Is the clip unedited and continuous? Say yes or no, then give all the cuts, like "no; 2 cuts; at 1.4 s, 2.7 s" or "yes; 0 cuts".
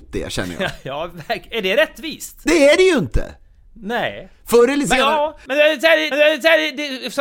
no; 2 cuts; at 4.4 s, 6.1 s